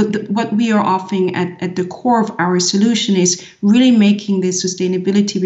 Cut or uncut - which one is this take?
uncut